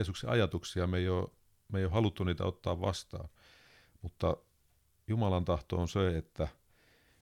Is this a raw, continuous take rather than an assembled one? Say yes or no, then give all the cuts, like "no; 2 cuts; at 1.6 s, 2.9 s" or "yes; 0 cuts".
yes; 0 cuts